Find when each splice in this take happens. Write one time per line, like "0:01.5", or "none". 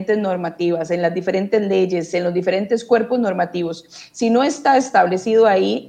none